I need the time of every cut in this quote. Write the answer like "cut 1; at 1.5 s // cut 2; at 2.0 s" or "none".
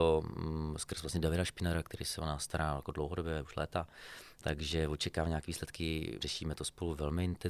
cut 1; at 6.2 s